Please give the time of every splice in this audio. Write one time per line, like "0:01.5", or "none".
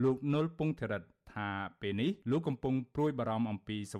0:02.2